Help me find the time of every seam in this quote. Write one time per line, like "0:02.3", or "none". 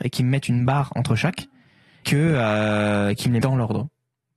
0:02.0
0:03.4

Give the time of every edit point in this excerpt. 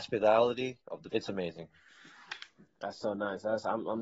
0:01.1

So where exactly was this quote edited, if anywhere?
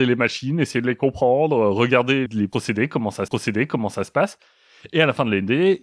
0:02.3
0:03.3

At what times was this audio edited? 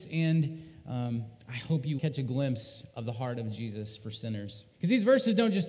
0:02.0
0:04.7

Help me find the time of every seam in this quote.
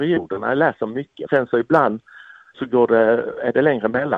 0:01.3
0:02.5

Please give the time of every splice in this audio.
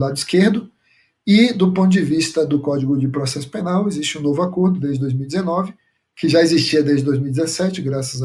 none

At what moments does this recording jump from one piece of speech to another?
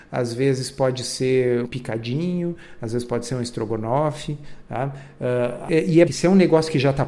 0:01.6
0:05.7
0:06.1

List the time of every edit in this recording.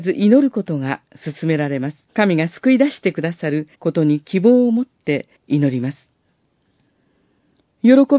0:02.0
0:03.7
0:05.4

